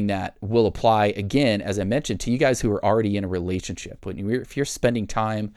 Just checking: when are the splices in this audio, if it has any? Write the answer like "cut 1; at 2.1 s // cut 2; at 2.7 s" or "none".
none